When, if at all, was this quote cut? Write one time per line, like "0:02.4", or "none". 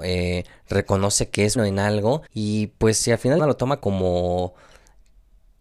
0:01.6
0:02.3
0:03.4
0:03.8